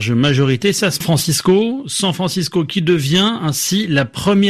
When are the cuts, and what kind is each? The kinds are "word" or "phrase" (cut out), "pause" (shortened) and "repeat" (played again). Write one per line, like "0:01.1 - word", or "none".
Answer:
0:01.0 - phrase